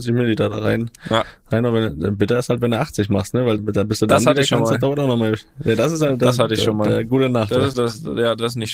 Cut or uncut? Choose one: cut